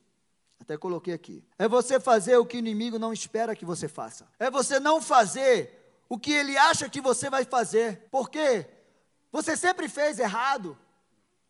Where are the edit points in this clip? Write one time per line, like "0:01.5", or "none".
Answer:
0:01.5
0:04.3
0:08.1